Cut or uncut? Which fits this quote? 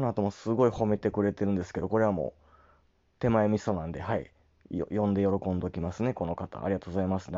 uncut